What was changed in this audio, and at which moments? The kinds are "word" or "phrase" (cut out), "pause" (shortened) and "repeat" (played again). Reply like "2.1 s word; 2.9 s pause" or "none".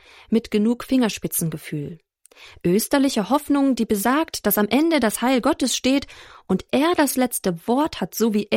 none